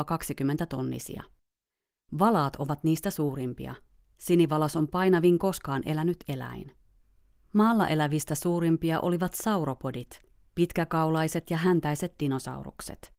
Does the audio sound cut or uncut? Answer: uncut